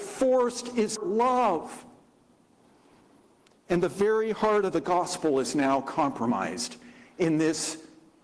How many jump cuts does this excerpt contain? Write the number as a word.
one